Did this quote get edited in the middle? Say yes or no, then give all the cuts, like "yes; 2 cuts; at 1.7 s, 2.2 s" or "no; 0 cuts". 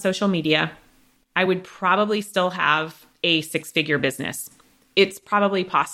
no; 0 cuts